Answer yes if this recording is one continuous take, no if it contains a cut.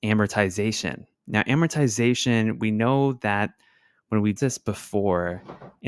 no